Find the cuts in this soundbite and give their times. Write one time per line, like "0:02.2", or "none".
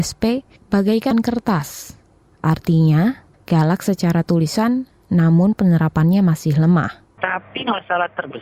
0:01.1
0:03.3